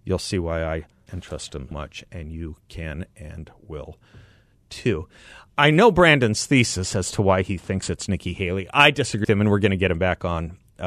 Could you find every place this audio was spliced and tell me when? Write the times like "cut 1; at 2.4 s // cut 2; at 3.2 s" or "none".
cut 1; at 1.1 s // cut 2; at 1.7 s // cut 3; at 9.2 s